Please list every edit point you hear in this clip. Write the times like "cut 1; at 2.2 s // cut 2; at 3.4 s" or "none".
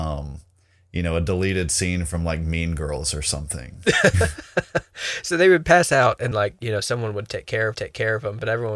cut 1; at 6.3 s // cut 2; at 7.7 s